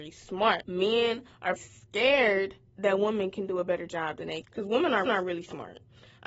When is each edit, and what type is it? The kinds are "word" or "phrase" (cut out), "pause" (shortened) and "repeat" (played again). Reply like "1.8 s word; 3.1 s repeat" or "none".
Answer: 1.6 s word; 4.4 s word; 5.1 s repeat